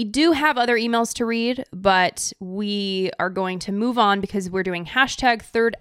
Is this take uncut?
yes; 0 cuts

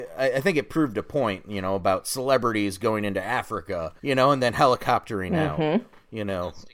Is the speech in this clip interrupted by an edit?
yes; 1 cut; at 4.0 s

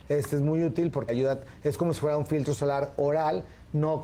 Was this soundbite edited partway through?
yes; 1 cut; at 1.1 s

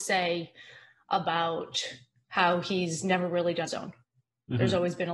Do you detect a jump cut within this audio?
yes; 1 cut; at 3.7 s

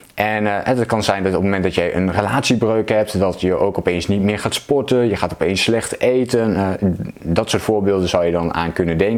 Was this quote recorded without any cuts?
yes; 0 cuts

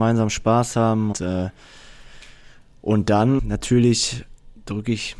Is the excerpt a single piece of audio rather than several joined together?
no; 2 cuts; at 1.1 s, 3.4 s

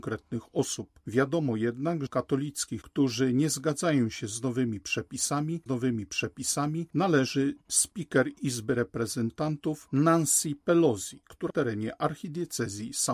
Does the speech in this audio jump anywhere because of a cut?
yes; 4 cuts; at 2.1 s, 2.8 s, 5.7 s, 11.5 s

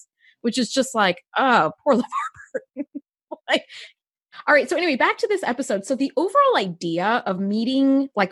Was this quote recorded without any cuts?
no; 1 cut; at 1.8 s

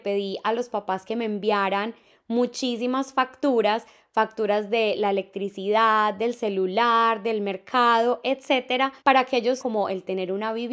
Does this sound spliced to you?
yes; 2 cuts; at 9.0 s, 9.6 s

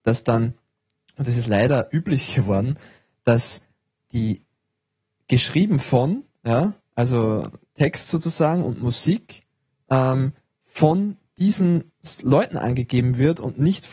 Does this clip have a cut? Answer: no; 0 cuts

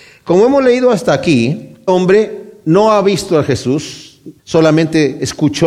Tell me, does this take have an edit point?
yes; 2 cuts; at 1.9 s, 4.4 s

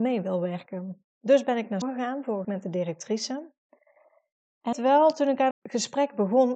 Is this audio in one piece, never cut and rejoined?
no; 4 cuts; at 1.8 s, 2.4 s, 4.7 s, 5.5 s

